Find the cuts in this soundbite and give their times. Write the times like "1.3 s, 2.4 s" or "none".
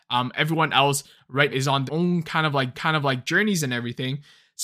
1.5 s, 1.9 s, 2.7 s